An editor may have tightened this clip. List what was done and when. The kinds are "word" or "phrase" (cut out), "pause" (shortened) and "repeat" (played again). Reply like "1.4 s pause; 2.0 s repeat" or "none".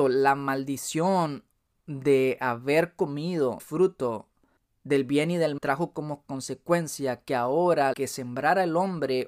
3.6 s word; 5.6 s word; 7.9 s word